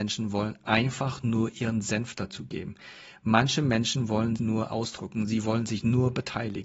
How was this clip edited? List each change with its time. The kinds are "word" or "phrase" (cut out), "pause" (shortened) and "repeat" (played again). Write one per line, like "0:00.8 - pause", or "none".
0:04.4 - word